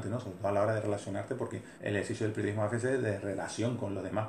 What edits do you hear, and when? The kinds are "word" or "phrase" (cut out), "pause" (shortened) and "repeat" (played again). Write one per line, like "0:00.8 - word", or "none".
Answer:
0:01.8 - pause